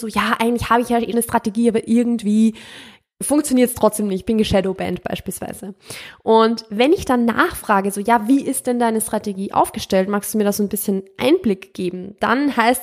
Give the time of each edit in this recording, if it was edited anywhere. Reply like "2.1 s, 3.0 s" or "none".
1.1 s